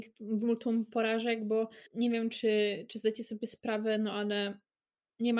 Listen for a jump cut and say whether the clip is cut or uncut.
cut